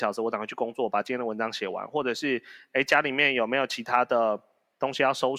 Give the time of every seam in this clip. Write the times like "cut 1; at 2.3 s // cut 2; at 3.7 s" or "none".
none